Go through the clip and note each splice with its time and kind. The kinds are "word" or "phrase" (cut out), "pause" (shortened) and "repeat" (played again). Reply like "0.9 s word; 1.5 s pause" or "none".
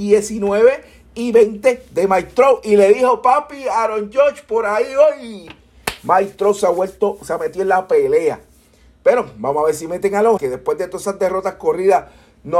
10.4 s phrase